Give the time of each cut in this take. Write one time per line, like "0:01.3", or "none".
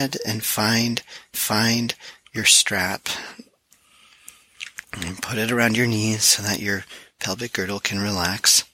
0:01.3
0:04.8